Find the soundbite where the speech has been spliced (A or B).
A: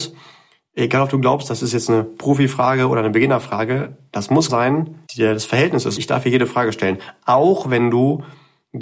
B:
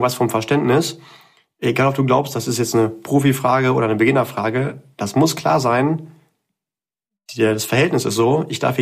A